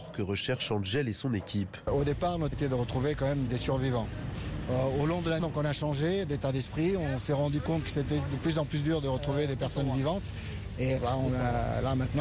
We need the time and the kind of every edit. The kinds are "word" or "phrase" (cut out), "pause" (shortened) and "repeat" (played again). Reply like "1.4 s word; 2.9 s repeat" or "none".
2.5 s word; 3.5 s word; 5.4 s word; 11.0 s word

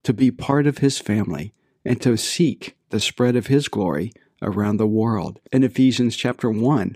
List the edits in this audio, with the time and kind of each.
5.5 s pause

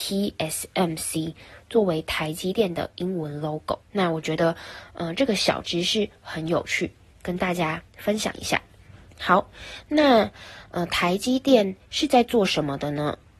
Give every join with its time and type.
3.8 s pause; 7.9 s pause; 9.1 s pause; 11.8 s pause

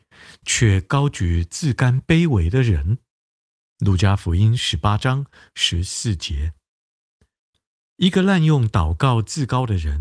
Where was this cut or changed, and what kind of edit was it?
none

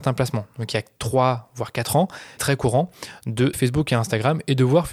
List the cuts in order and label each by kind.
2.4 s word; 3.5 s word

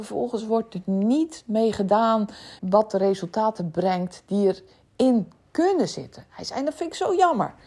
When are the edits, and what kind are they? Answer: 2.6 s word

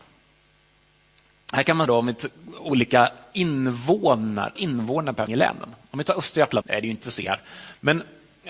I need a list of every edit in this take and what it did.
1.9 s word; 4.6 s word; 5.3 s word; 6.6 s word; 7.0 s word

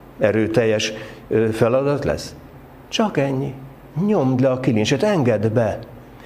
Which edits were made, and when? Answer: none

